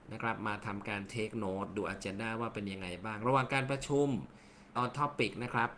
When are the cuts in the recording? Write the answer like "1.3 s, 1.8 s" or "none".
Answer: 4.8 s

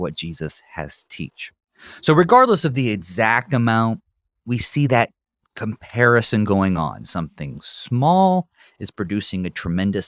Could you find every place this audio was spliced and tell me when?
none

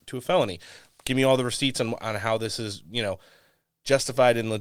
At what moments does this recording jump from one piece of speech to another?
none

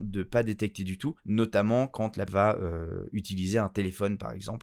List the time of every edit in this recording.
1.2 s, 2.3 s

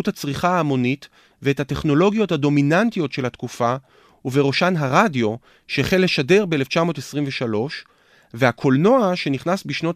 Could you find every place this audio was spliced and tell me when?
none

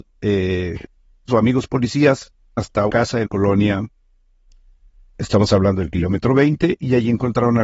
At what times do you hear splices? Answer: 1.3 s, 2.6 s, 2.9 s, 3.2 s, 5.1 s

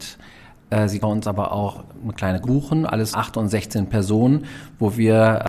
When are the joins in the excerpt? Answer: 1.0 s, 2.4 s, 3.1 s

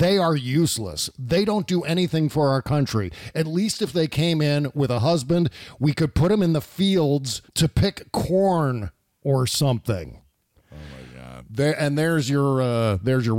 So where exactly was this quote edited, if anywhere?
7.5 s

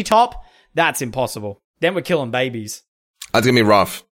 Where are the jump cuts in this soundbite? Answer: 1.7 s

